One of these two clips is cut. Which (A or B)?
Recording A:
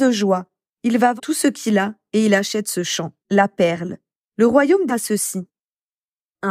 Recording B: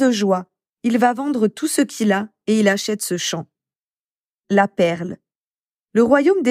A